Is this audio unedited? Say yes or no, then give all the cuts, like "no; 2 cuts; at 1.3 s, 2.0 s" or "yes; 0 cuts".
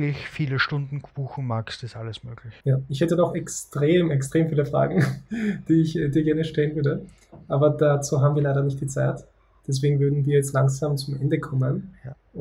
no; 1 cut; at 2.6 s